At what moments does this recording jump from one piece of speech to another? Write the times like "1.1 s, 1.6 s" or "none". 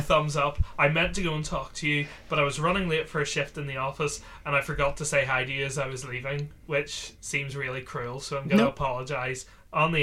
none